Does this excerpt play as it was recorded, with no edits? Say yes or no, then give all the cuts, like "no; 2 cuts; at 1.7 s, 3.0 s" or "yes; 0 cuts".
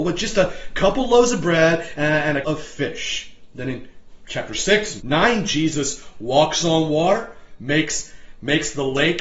no; 2 cuts; at 2.4 s, 5.0 s